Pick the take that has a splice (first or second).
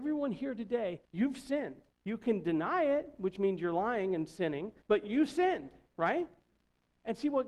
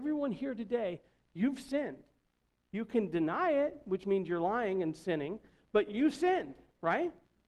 first